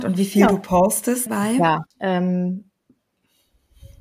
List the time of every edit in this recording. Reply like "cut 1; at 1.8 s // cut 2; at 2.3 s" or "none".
cut 1; at 1.3 s // cut 2; at 1.9 s